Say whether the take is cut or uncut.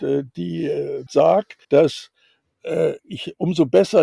cut